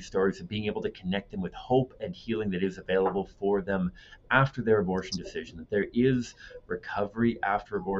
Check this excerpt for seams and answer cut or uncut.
uncut